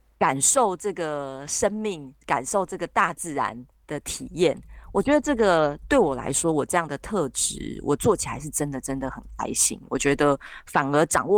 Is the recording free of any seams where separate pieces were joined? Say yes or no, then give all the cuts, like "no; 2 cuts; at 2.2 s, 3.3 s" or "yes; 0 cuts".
no; 2 cuts; at 2.2 s, 3.7 s